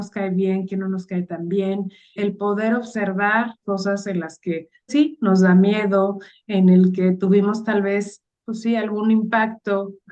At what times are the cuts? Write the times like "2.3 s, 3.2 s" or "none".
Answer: 2.2 s, 3.6 s, 4.9 s, 8.4 s